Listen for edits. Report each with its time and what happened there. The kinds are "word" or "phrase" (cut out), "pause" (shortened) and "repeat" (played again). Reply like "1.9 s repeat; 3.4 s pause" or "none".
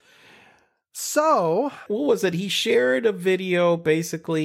1.9 s phrase